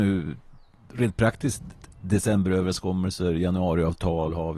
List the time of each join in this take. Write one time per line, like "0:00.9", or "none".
none